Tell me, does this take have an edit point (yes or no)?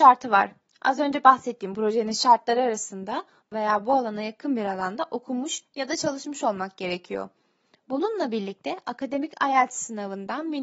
yes